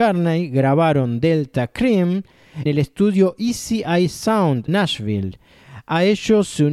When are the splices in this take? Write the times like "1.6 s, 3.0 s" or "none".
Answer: 2.7 s, 4.7 s